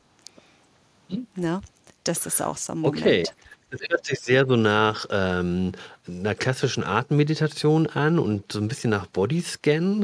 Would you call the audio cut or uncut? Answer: uncut